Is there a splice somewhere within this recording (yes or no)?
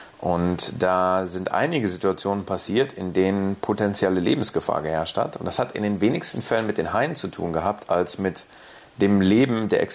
no